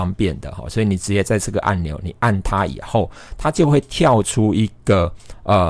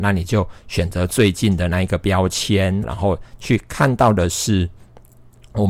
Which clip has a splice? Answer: second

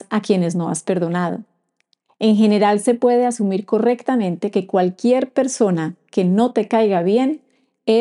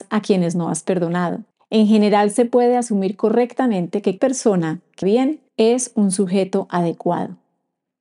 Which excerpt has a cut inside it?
second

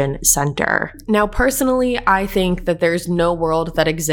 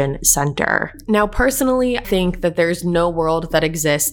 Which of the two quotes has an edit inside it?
second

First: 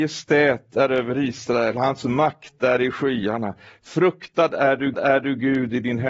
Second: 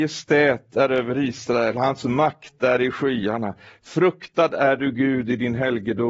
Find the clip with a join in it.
first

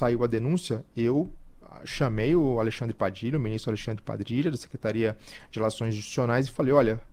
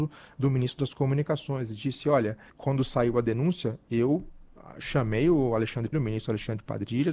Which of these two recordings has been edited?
second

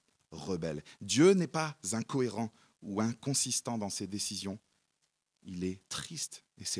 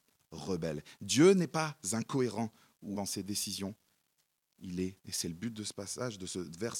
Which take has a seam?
second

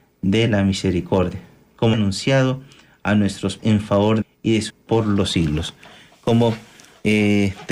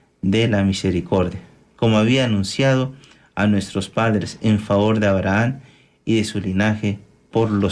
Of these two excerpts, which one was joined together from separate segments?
first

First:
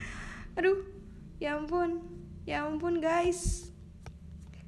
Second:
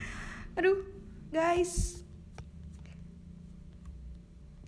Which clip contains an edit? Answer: second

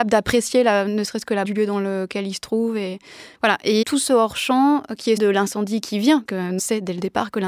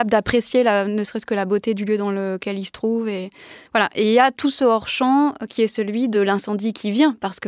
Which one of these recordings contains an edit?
first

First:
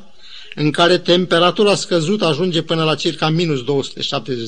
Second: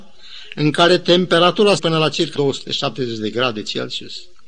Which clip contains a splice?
second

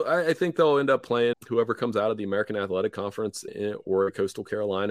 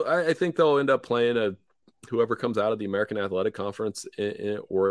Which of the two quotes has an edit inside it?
first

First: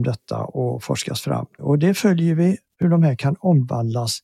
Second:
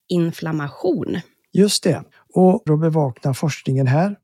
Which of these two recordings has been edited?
second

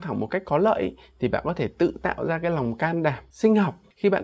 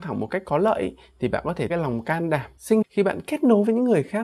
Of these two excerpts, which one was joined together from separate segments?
second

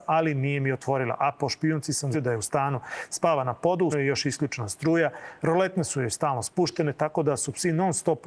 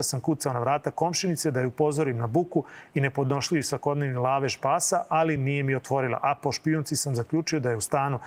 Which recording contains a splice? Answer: first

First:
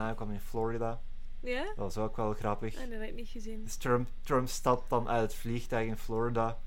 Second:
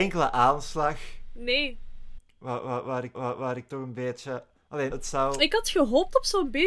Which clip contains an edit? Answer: second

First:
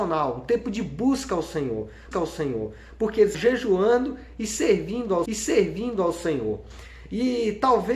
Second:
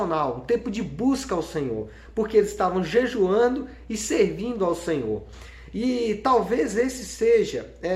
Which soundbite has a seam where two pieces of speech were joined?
first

